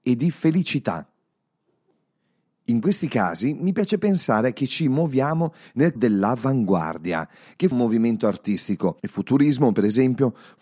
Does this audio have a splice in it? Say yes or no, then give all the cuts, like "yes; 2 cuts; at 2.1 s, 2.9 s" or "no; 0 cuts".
yes; 3 cuts; at 6.0 s, 7.7 s, 9.0 s